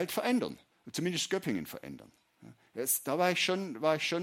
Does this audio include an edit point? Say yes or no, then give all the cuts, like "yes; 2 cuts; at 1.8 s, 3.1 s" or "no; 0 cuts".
no; 0 cuts